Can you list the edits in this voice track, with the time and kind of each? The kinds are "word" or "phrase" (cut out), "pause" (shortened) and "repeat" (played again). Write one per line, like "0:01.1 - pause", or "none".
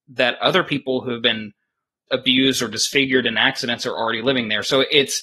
0:02.1 - word